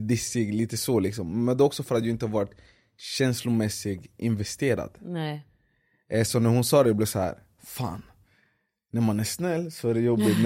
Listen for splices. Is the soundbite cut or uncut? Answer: uncut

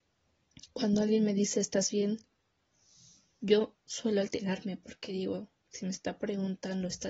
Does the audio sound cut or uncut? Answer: uncut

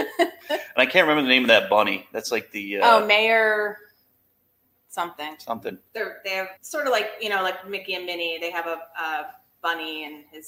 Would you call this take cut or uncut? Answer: cut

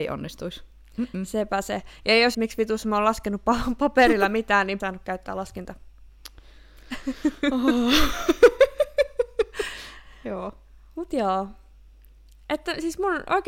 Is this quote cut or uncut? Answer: cut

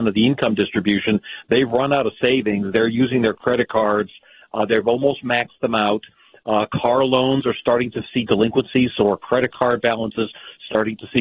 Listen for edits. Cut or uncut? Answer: uncut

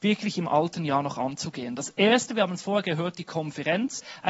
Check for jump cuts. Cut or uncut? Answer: uncut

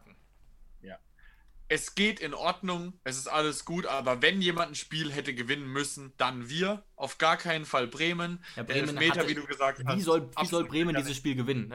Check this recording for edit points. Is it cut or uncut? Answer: cut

